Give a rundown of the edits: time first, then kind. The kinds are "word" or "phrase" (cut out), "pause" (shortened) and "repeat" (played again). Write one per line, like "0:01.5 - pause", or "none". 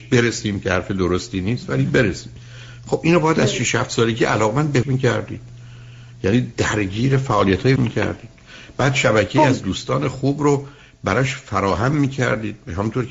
0:04.8 - word
0:07.8 - word